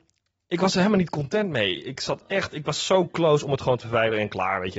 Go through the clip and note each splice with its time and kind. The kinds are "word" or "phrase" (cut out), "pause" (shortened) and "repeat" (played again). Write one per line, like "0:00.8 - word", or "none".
none